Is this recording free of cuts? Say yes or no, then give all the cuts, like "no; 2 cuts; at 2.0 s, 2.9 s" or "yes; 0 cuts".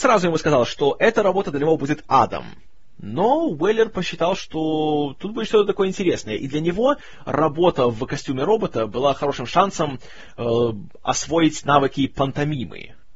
yes; 0 cuts